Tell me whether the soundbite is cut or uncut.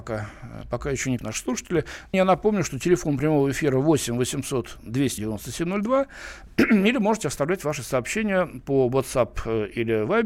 cut